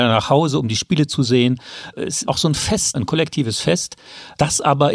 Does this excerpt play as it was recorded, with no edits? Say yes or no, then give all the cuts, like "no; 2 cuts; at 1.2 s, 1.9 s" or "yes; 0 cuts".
no; 2 cuts; at 2.2 s, 2.9 s